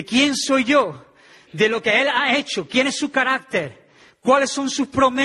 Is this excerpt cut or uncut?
uncut